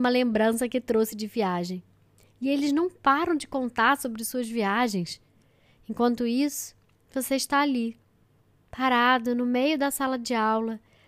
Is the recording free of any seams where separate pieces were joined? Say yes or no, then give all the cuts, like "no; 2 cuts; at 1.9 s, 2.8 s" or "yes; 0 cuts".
yes; 0 cuts